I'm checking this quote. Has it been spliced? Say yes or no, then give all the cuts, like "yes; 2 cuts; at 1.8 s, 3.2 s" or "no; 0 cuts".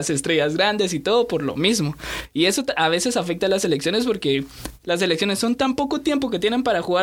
no; 0 cuts